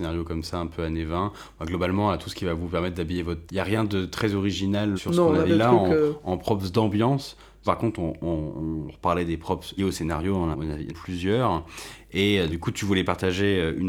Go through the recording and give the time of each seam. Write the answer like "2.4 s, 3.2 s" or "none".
3.5 s, 5.0 s, 5.5 s, 7.7 s, 9.8 s, 10.5 s, 10.9 s, 12.5 s